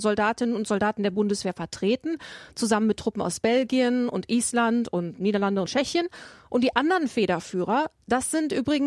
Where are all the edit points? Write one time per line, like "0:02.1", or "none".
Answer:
0:05.7